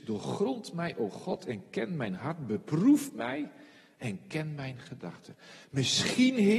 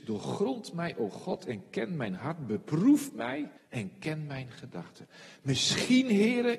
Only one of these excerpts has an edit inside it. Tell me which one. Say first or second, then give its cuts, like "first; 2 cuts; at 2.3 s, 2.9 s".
second; 1 cut; at 3.6 s